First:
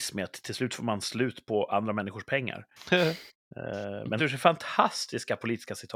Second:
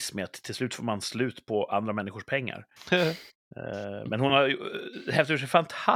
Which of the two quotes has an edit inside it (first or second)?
first